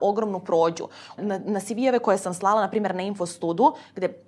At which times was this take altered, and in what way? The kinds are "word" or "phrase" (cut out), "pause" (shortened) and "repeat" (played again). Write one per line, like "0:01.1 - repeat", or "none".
0:01.2 - phrase